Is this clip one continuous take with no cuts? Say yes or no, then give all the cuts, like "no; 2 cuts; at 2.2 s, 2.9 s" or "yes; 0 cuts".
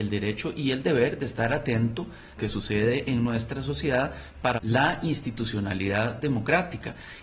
no; 2 cuts; at 2.4 s, 4.6 s